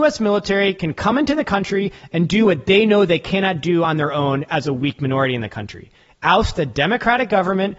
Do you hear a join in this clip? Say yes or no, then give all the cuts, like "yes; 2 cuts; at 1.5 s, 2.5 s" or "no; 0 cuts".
no; 0 cuts